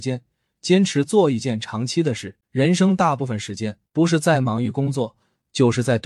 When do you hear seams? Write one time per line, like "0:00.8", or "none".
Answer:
0:02.4
0:03.9